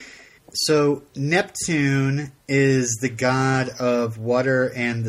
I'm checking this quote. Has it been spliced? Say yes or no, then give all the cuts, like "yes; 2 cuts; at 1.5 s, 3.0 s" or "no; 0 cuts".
no; 0 cuts